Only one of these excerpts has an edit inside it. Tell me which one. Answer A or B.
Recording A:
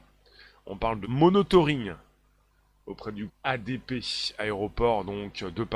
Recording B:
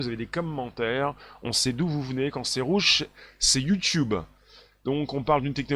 A